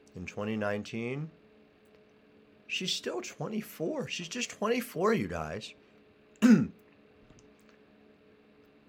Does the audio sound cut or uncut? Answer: uncut